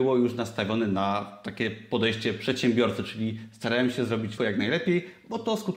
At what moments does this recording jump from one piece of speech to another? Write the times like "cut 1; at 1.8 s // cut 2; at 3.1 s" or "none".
cut 1; at 4.4 s